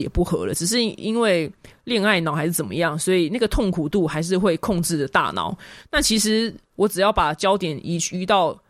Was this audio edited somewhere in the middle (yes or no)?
no